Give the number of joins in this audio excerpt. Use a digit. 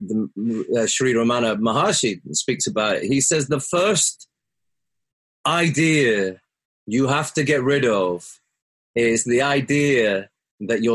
0